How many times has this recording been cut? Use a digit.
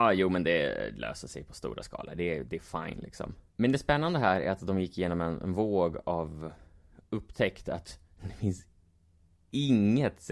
2